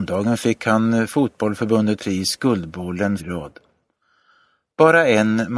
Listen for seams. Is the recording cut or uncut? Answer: cut